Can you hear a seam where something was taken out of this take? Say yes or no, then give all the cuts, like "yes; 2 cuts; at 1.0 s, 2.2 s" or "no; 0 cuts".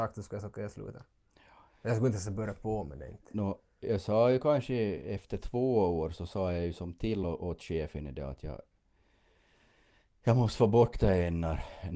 no; 0 cuts